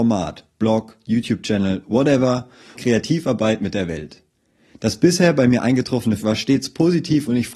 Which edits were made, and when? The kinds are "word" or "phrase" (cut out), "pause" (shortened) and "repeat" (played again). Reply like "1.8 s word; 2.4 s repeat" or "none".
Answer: 1.8 s word; 2.7 s phrase; 6.2 s word